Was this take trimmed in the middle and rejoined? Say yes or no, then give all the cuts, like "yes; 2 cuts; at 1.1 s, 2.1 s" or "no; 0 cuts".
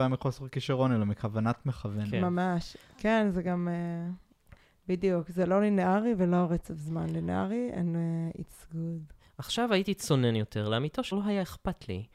yes; 1 cut; at 11.1 s